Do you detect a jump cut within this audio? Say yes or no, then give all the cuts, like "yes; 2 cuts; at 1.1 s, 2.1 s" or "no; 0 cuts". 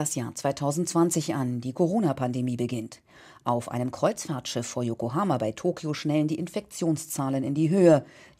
no; 0 cuts